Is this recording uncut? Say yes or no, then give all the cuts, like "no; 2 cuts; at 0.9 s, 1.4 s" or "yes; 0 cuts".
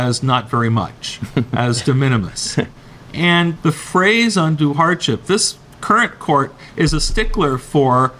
no; 2 cuts; at 2.8 s, 3.6 s